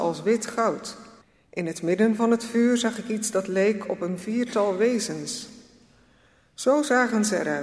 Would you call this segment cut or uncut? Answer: cut